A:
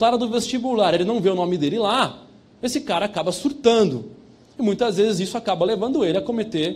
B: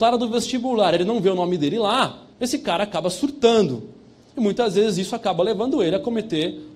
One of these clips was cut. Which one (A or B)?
B